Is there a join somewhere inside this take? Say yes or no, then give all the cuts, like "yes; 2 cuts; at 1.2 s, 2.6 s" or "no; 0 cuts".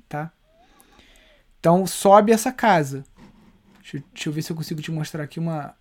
no; 0 cuts